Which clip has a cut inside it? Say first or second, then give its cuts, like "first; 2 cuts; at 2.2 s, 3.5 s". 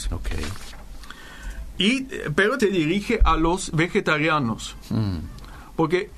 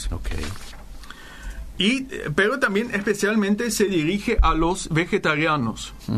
first; 1 cut; at 2.6 s